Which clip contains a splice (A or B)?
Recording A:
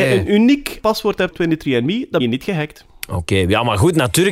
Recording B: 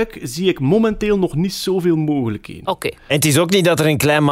A